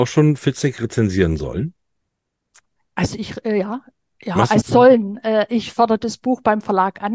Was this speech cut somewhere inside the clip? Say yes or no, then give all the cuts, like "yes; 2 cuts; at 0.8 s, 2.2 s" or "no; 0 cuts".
yes; 1 cut; at 4.6 s